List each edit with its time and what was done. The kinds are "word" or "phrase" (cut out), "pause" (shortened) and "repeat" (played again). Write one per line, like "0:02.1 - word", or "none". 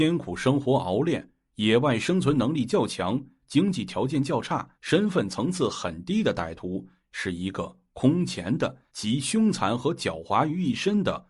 0:04.7 - pause
0:08.9 - pause